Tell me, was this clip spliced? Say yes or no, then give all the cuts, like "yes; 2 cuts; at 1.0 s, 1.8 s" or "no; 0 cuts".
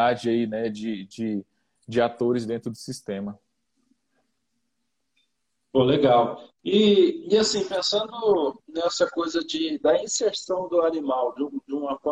no; 0 cuts